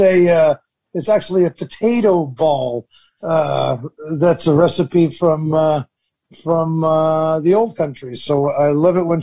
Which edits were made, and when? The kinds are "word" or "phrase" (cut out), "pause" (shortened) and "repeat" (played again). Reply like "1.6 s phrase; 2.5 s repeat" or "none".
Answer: none